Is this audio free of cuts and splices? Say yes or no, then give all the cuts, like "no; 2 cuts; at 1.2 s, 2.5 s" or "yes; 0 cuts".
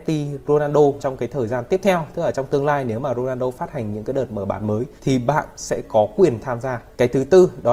no; 2 cuts; at 1.0 s, 5.0 s